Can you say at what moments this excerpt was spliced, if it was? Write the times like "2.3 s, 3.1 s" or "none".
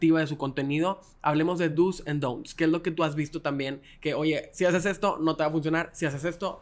none